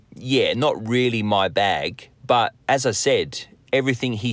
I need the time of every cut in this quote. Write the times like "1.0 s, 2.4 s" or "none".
none